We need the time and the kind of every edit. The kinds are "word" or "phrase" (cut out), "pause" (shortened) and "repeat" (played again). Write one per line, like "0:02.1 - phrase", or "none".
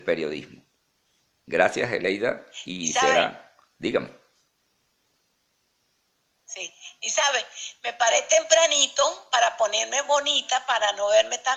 none